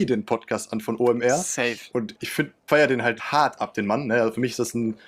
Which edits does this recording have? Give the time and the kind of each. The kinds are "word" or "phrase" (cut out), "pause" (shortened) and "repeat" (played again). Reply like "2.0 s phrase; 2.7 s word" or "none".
2.1 s word; 2.7 s word; 3.2 s word